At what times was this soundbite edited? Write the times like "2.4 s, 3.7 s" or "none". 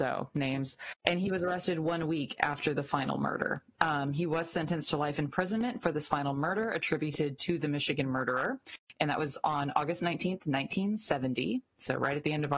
1.0 s